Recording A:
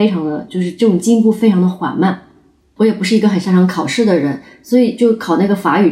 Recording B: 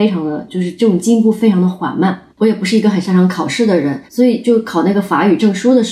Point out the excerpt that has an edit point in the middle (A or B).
B